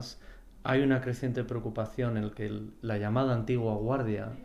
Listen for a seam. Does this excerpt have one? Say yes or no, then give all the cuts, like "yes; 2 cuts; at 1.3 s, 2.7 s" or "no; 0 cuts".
no; 0 cuts